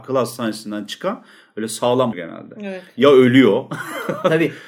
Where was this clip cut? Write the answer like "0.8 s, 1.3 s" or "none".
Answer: 2.1 s